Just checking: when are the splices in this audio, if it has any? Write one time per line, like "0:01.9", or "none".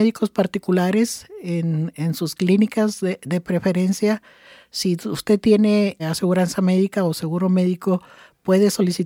0:06.0